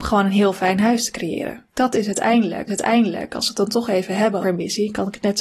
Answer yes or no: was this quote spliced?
yes